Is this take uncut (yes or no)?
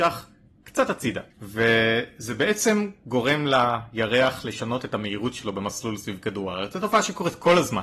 no